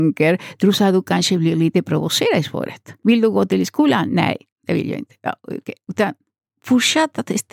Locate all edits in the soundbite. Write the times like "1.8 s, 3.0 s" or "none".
none